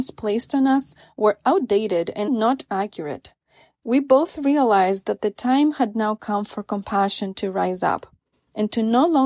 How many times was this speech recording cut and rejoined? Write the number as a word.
one